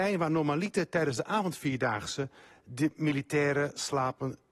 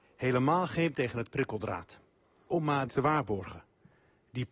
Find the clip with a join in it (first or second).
second